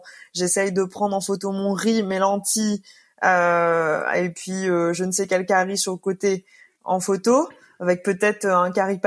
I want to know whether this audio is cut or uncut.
uncut